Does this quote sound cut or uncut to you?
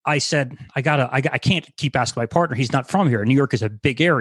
uncut